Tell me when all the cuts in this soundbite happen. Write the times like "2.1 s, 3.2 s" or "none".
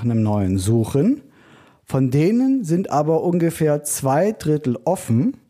none